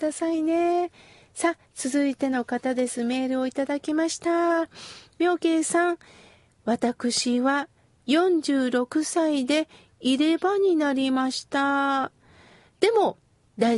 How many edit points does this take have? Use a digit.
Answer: 0